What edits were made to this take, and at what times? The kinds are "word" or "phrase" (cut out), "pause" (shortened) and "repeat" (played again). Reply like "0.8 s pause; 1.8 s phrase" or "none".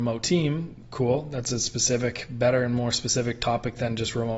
none